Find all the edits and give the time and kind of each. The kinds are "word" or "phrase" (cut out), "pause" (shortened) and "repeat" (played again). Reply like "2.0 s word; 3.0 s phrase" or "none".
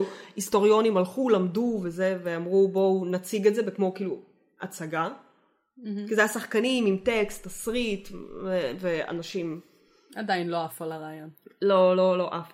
none